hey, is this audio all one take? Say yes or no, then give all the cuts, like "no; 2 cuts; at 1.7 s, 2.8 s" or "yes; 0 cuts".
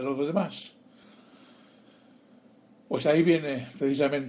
yes; 0 cuts